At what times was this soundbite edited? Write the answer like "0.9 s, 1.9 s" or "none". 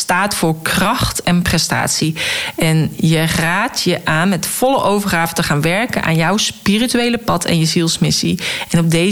none

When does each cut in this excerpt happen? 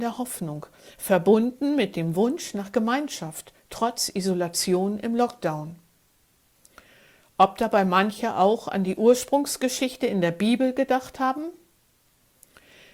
none

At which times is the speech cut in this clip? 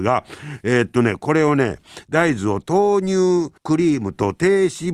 3.6 s

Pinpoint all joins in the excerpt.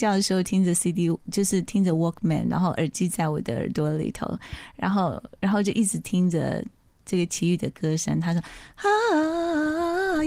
none

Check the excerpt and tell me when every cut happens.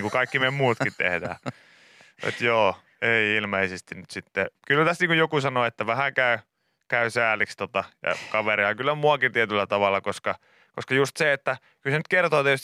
4.6 s

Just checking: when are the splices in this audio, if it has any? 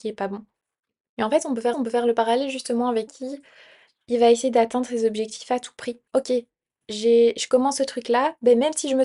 1.7 s, 3.1 s, 6.1 s

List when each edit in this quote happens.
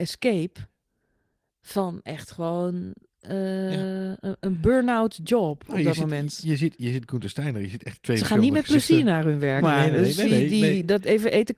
9.6 s

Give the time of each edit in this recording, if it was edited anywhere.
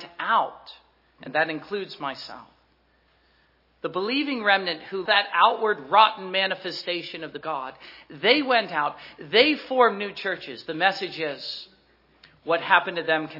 5.1 s, 7.4 s

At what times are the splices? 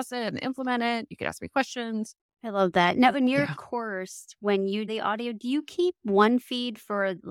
4.9 s

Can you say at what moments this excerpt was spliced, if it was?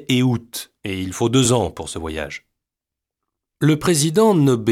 none

